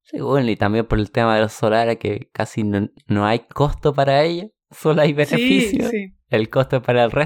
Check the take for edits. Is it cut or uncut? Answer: uncut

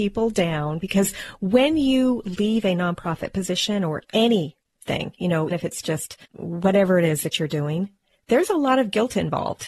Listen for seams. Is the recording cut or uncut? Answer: cut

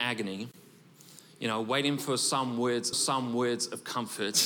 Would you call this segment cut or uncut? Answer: cut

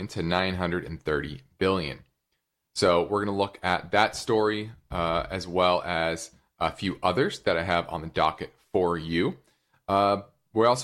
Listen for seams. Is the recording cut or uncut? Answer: uncut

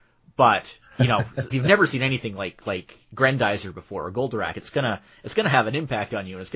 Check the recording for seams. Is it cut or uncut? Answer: cut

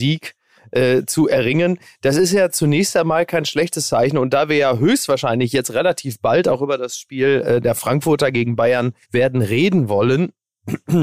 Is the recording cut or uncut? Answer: cut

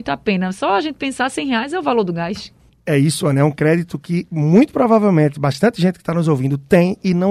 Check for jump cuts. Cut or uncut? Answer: uncut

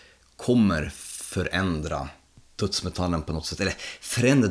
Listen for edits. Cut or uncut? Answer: uncut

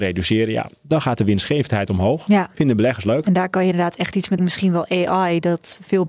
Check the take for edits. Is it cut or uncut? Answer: cut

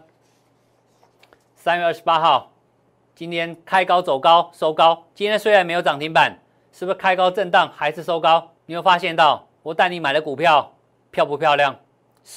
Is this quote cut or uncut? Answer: cut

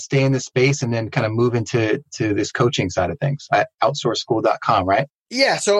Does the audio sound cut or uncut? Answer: uncut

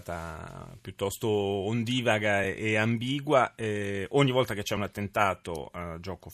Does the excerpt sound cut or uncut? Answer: uncut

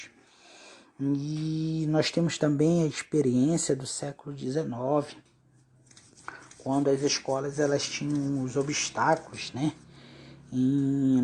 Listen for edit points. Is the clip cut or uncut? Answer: uncut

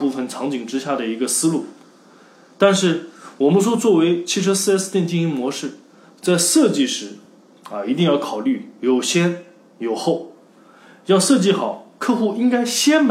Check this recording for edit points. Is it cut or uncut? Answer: uncut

